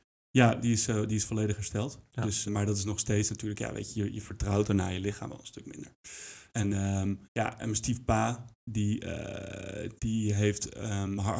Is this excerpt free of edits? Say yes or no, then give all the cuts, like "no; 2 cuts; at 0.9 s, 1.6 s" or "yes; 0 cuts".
no; 3 cuts; at 2.5 s, 6.5 s, 7.2 s